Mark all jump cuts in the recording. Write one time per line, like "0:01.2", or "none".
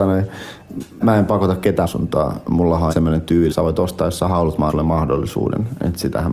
0:01.0
0:01.8
0:02.9
0:03.5
0:04.7